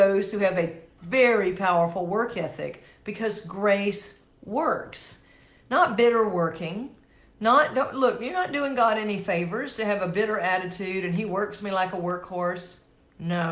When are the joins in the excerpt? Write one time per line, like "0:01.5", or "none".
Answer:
none